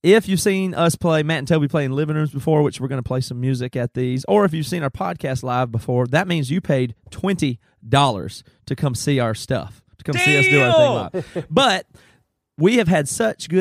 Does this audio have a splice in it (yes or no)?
no